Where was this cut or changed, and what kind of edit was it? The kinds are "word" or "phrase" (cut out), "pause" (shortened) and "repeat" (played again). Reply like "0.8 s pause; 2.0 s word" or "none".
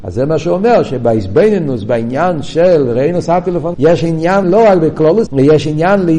3.7 s word; 4.4 s word; 5.3 s word